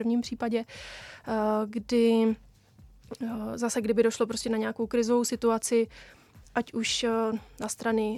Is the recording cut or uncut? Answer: uncut